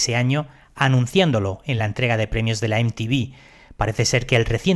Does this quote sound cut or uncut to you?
uncut